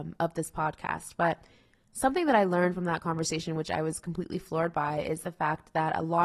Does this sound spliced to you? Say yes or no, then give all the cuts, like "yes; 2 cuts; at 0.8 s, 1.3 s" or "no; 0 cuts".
no; 0 cuts